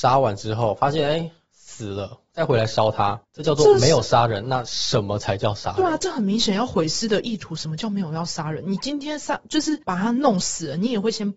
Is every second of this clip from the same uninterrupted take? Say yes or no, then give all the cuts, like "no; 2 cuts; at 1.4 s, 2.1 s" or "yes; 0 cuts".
no; 2 cuts; at 3.2 s, 9.8 s